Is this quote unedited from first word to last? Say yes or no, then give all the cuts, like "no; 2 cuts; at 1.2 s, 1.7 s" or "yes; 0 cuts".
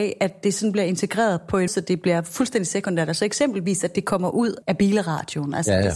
no; 2 cuts; at 1.7 s, 4.6 s